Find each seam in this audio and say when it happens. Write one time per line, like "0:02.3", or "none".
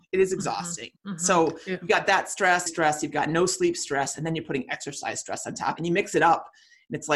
0:01.0
0:02.7
0:05.8